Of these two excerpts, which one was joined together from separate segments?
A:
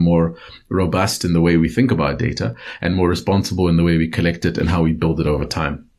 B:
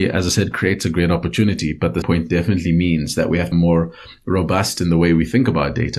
B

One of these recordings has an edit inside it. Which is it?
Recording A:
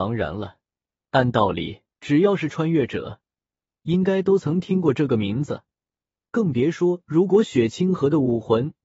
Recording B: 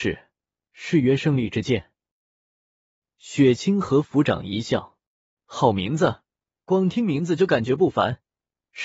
A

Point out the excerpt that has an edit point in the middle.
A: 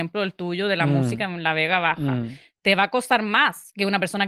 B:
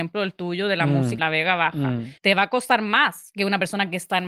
B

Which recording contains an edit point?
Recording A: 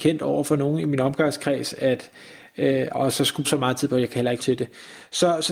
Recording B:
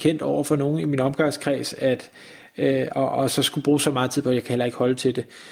A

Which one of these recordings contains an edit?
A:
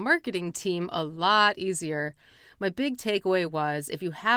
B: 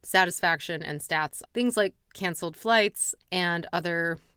B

